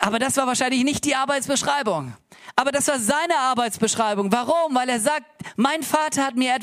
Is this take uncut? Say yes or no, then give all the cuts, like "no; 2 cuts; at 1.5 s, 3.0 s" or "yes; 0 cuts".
yes; 0 cuts